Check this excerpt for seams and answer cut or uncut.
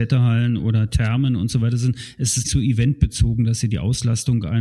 cut